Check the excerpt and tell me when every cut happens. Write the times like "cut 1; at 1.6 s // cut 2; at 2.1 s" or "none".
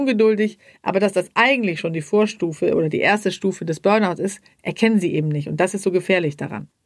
none